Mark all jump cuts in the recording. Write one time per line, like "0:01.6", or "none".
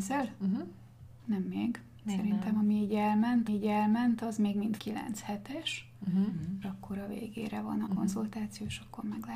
0:03.5
0:04.8
0:06.6
0:07.9